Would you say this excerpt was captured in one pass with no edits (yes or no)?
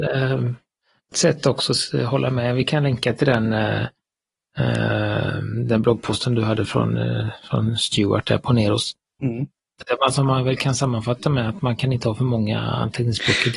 no